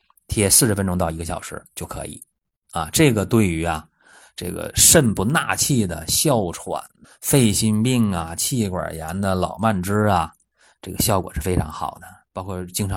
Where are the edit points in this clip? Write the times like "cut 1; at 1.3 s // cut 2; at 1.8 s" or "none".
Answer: cut 1; at 7.0 s